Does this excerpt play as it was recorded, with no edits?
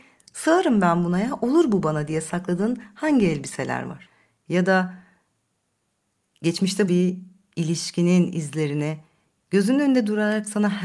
no; 1 cut; at 6.9 s

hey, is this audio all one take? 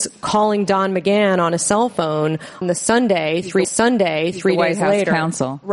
no; 2 cuts; at 2.6 s, 3.6 s

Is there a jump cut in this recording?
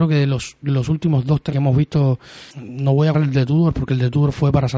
yes; 3 cuts; at 1.5 s, 2.5 s, 3.1 s

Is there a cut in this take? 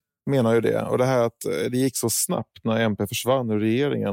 no; 0 cuts

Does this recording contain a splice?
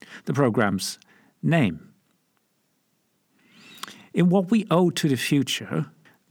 no; 0 cuts

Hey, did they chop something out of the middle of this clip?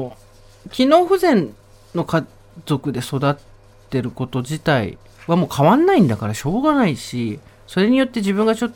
no; 0 cuts

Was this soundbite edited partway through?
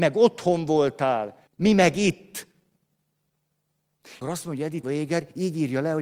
yes; 3 cuts; at 1.5 s, 4.2 s, 4.8 s

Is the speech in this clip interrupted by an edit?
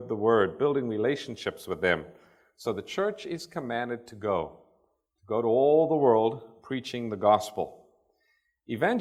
no; 0 cuts

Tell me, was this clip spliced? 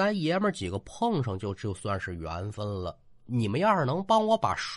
no; 0 cuts

